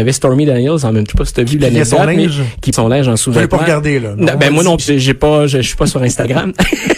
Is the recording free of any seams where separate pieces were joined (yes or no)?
no